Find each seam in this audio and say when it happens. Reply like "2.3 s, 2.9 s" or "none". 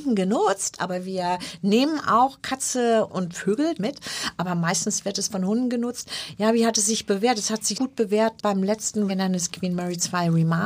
3.1 s, 3.8 s, 7.7 s, 8.4 s, 9.1 s